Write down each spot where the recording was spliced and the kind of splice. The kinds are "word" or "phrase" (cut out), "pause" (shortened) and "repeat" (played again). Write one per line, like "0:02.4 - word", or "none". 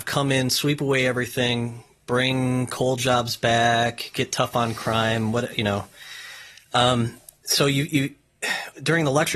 none